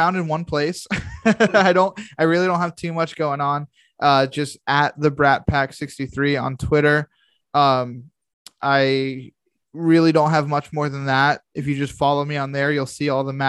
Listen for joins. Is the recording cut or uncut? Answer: uncut